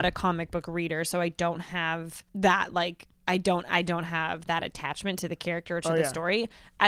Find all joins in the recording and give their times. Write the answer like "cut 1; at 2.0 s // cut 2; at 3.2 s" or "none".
cut 1; at 2.3 s